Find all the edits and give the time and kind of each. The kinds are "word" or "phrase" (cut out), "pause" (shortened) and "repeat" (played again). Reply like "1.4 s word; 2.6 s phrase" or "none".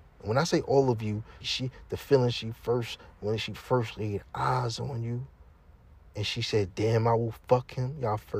1.4 s word